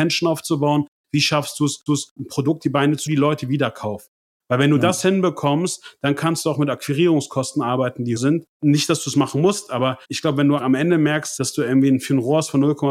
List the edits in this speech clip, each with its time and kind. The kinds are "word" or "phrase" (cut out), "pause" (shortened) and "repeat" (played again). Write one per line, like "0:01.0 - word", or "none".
0:01.9 - repeat
0:02.6 - word
0:03.1 - phrase
0:04.2 - pause
0:08.2 - word
0:10.0 - pause
0:10.6 - word
0:11.4 - word